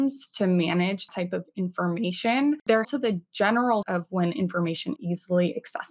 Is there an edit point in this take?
yes; 4 cuts; at 1.1 s, 2.8 s, 3.8 s, 5.0 s

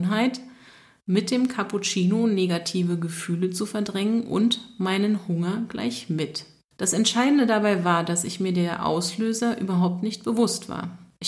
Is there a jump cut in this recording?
no; 0 cuts

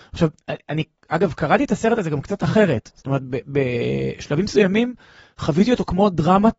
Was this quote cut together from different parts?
no; 0 cuts

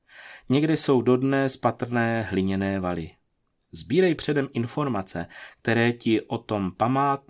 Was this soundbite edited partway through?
no; 0 cuts

